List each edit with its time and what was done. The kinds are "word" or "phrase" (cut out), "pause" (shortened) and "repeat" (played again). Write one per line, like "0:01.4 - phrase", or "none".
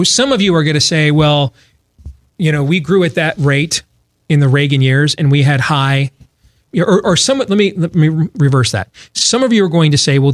0:06.7 - word